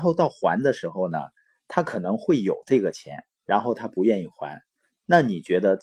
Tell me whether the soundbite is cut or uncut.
uncut